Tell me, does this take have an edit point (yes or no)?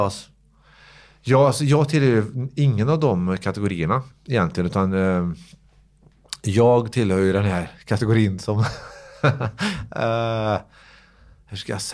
no